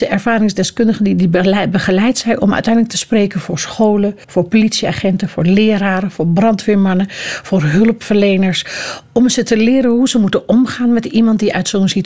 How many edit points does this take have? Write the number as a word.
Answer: one